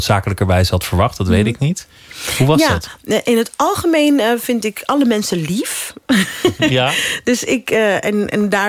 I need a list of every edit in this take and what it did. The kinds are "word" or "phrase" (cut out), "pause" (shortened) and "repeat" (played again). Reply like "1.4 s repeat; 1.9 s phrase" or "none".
none